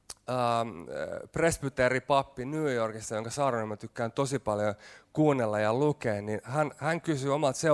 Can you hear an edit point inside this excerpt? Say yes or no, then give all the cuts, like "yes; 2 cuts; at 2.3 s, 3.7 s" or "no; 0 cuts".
no; 0 cuts